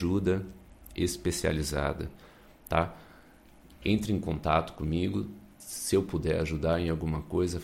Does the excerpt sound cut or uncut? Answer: uncut